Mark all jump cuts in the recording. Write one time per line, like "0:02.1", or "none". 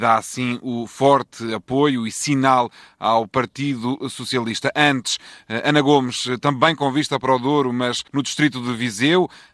0:08.1